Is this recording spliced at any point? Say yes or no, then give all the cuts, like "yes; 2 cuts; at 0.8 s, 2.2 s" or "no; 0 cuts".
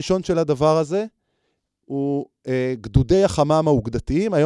no; 0 cuts